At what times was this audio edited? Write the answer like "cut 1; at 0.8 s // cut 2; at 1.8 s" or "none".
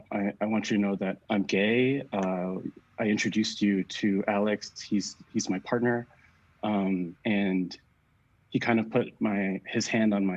cut 1; at 1.2 s // cut 2; at 7.2 s